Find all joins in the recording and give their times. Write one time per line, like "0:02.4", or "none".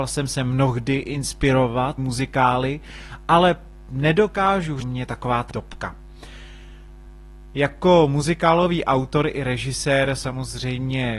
0:02.0
0:04.8
0:05.5